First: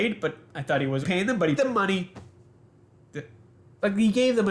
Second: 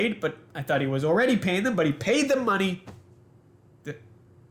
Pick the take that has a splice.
first; 2 cuts; at 1.0 s, 1.6 s

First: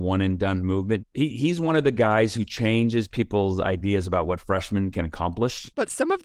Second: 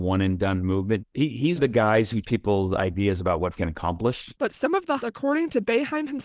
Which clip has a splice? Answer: second; 4 cuts; at 1.6 s, 2.2 s, 3.6 s, 5.0 s

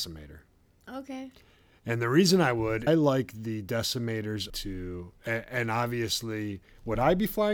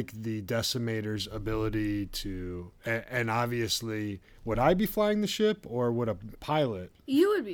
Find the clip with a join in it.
first; 2 cuts; at 2.9 s, 4.5 s

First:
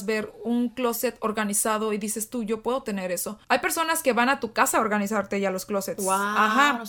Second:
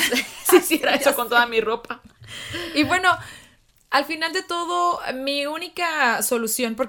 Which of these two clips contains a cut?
first; 1 cut; at 3.4 s

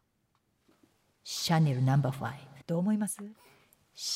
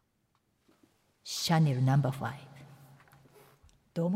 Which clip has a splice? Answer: first; 1 cut; at 2.6 s

